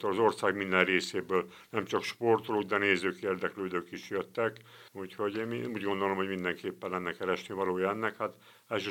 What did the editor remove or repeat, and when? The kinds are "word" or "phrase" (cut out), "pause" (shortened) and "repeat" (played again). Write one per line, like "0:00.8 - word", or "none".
0:04.9 - pause